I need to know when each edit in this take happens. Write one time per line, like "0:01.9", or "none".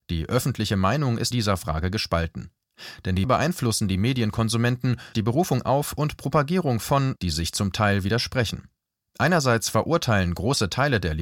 0:01.3
0:03.2
0:05.1
0:07.2